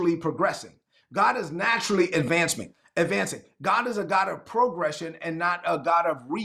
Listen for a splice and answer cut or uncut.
uncut